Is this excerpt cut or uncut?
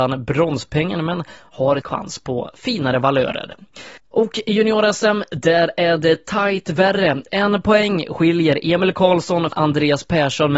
cut